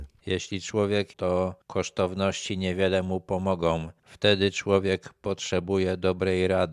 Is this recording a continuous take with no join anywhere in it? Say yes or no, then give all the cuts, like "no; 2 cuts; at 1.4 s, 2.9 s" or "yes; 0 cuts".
no; 1 cut; at 1.1 s